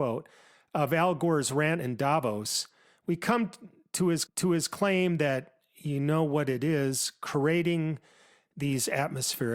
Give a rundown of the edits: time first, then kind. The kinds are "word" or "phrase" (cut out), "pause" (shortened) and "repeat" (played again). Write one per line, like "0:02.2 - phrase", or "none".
0:04.3 - repeat